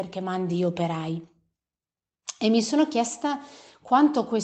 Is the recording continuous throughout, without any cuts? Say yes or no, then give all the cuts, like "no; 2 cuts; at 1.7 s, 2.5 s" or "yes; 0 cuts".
yes; 0 cuts